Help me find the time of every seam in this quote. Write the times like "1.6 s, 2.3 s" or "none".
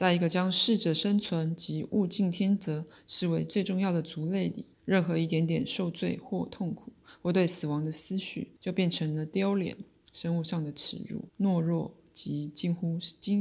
4.7 s, 8.6 s, 11.3 s